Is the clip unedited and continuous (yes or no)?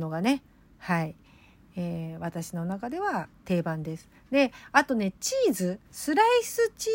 no